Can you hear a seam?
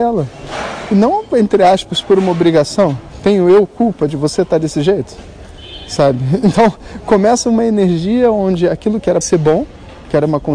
yes; 1 cut; at 9.2 s

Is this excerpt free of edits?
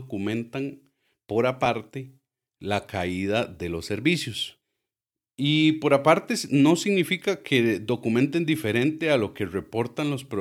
yes; 0 cuts

